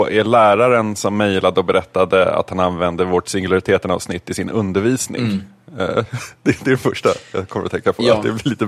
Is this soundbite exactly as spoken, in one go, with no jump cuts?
yes; 0 cuts

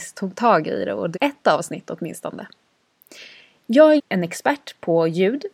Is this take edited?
yes; 2 cuts; at 1.1 s, 4.0 s

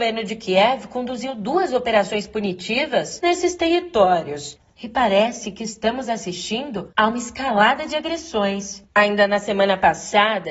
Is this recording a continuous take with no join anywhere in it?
no; 1 cut; at 8.8 s

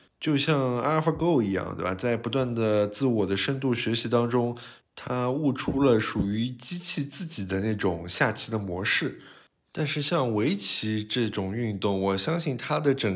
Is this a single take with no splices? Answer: yes; 0 cuts

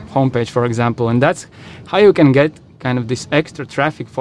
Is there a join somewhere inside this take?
no; 0 cuts

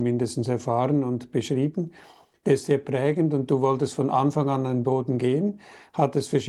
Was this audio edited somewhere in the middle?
no; 0 cuts

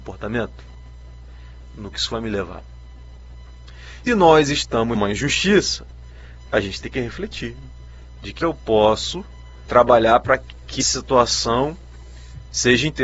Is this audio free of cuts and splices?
no; 7 cuts; at 1.9 s, 4.1 s, 4.9 s, 6.8 s, 8.4 s, 9.7 s, 10.8 s

